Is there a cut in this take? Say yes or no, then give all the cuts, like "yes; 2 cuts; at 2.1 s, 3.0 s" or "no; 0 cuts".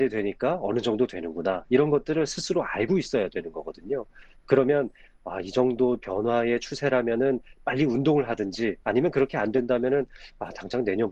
yes; 1 cut; at 8.8 s